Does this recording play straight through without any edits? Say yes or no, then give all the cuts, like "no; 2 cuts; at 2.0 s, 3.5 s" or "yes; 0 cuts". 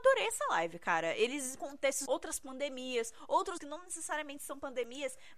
no; 3 cuts; at 1.6 s, 2.1 s, 3.6 s